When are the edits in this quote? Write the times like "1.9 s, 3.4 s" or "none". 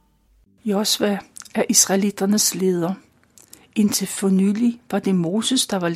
none